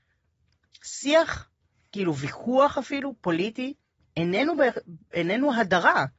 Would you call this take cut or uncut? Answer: uncut